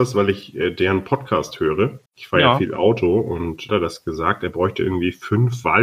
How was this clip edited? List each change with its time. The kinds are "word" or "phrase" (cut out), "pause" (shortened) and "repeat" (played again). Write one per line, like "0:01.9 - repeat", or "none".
0:02.1 - pause
0:03.7 - phrase